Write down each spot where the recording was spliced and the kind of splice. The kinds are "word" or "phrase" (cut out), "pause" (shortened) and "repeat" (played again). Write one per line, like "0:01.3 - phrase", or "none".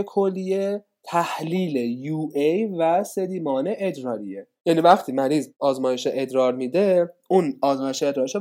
none